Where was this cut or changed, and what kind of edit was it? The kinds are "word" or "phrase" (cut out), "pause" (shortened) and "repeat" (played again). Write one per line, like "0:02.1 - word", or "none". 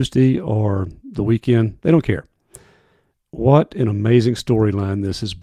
none